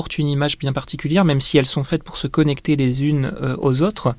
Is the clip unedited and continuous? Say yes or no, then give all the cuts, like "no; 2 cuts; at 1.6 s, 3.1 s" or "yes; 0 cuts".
yes; 0 cuts